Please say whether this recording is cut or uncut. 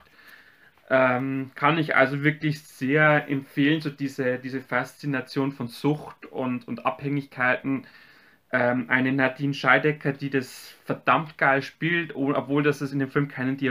uncut